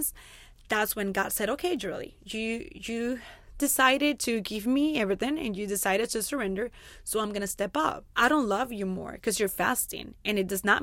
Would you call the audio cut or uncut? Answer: cut